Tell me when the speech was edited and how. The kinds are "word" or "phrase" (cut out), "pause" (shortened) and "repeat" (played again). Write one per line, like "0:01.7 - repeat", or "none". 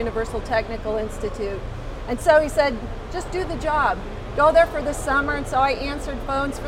none

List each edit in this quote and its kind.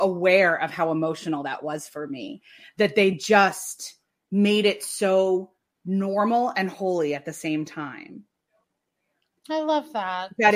none

